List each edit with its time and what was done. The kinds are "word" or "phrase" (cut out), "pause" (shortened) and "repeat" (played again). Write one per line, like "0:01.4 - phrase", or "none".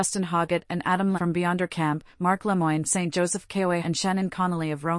0:01.1 - word
0:02.8 - word
0:03.8 - word